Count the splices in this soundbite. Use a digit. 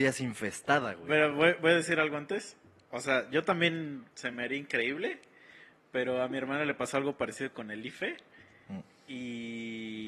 0